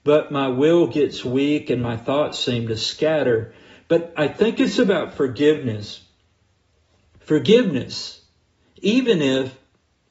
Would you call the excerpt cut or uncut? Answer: uncut